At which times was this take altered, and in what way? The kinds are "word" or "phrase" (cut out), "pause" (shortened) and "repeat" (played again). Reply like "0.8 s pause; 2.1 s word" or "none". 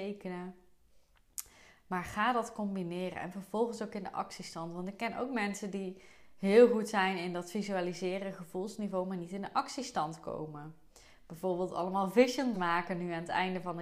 12.5 s word